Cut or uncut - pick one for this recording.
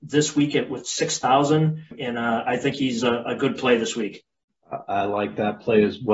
uncut